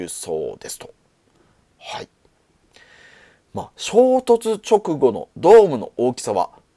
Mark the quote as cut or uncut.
uncut